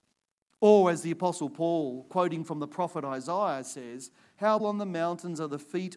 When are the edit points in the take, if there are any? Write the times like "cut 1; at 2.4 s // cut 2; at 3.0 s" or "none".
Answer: cut 1; at 4.6 s